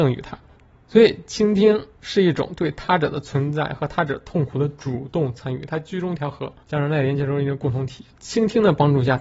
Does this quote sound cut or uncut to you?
cut